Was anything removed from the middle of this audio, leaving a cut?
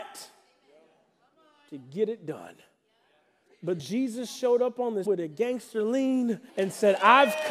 yes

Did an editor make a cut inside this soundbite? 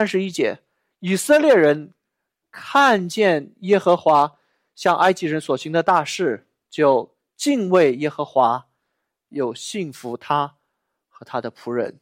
no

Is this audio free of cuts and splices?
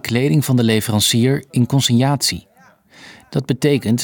yes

